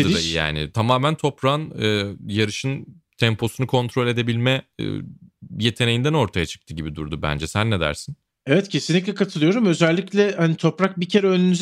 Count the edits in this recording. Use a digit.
0